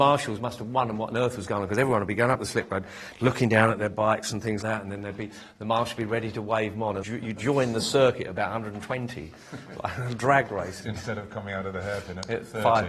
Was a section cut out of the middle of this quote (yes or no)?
yes